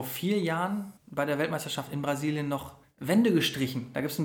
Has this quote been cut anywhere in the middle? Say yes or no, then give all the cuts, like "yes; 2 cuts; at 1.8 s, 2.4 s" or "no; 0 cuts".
yes; 2 cuts; at 1.0 s, 2.8 s